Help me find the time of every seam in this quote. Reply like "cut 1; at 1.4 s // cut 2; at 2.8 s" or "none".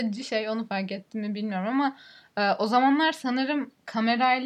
none